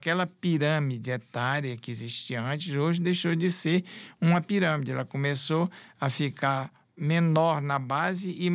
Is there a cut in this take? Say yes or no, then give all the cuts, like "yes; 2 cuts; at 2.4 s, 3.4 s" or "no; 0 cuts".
no; 0 cuts